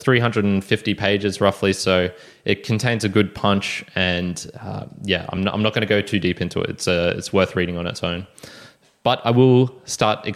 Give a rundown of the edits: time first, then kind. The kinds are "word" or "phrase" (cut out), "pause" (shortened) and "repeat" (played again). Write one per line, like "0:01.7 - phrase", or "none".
none